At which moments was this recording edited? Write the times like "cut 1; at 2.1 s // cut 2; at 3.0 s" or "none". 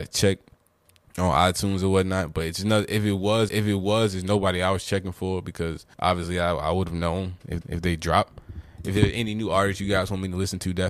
cut 1; at 3.5 s // cut 2; at 5.9 s // cut 3; at 7.6 s